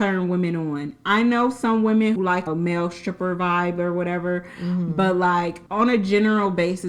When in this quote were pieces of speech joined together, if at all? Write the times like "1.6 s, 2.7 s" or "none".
2.2 s, 2.5 s, 5.7 s